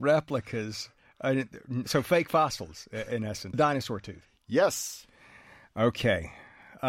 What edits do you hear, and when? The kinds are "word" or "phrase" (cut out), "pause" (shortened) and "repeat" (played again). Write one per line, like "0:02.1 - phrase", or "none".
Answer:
0:03.5 - phrase